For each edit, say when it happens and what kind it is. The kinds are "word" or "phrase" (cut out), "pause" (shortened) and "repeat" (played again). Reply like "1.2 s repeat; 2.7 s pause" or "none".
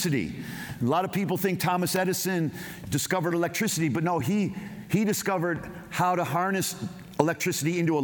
none